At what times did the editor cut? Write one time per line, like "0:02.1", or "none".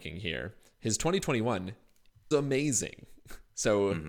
0:02.3

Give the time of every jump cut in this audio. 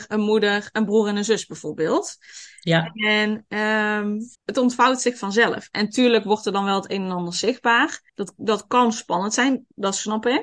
0:04.3
0:08.1

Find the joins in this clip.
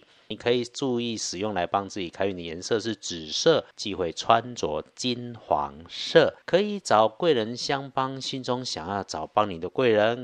0:03.7
0:06.4

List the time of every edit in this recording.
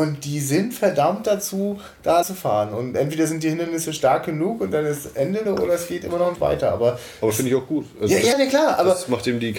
0:02.2
0:05.5
0:06.4
0:08.3

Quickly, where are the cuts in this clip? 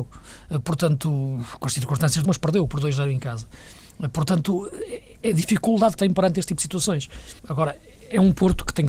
0:02.2
0:05.2
0:05.9
0:07.4

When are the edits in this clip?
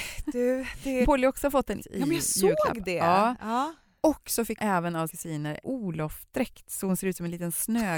0:01.0
0:01.8
0:04.6
0:05.1
0:05.6

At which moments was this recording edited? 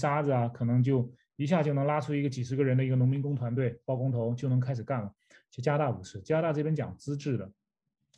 none

